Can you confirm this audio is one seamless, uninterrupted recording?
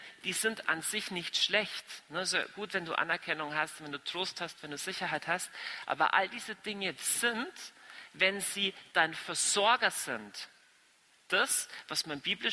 yes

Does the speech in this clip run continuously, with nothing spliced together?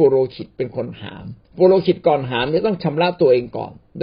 no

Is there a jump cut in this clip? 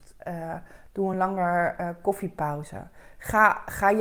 no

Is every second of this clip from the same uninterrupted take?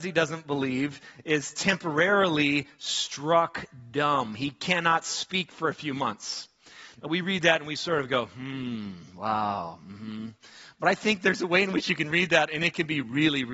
yes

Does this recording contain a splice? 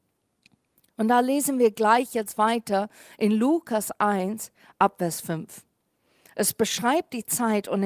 no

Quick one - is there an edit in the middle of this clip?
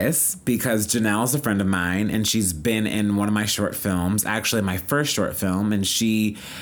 no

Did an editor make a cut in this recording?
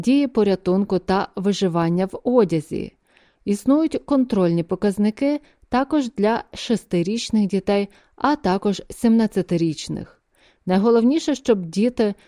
no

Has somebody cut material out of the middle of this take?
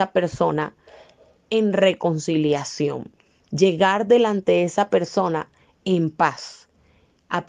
no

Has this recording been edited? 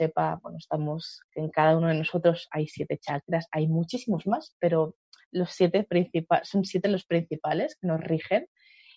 no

